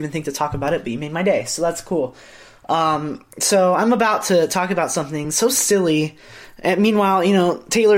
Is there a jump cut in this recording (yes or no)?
no